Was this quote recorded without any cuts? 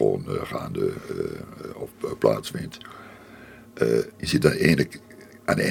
no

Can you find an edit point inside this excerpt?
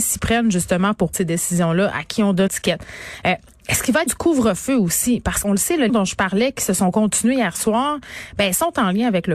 yes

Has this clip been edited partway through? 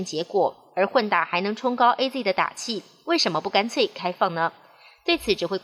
no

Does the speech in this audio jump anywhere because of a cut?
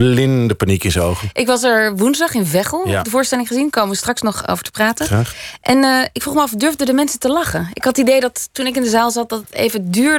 no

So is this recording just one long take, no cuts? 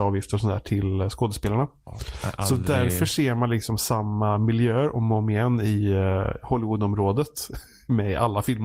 yes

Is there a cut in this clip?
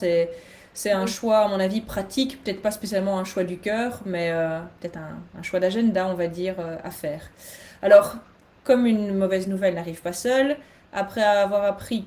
no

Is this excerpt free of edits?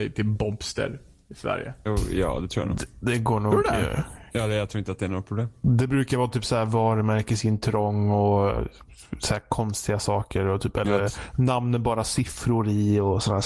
yes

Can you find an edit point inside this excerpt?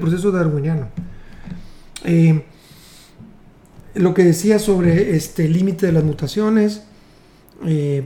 no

